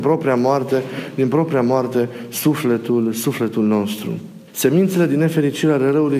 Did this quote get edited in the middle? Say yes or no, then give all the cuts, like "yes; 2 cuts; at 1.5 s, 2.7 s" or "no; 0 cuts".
yes; 1 cut; at 4.5 s